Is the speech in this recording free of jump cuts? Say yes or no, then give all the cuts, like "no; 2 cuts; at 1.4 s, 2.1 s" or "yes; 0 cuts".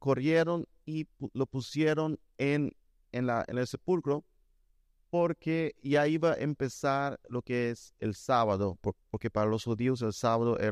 yes; 0 cuts